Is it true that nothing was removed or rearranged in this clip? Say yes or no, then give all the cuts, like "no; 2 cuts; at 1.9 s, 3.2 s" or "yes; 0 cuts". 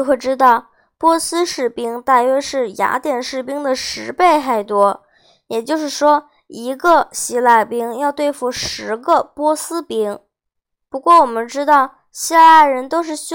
no; 1 cut; at 10.6 s